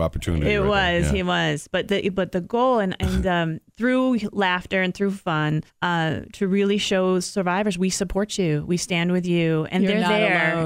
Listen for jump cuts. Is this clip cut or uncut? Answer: cut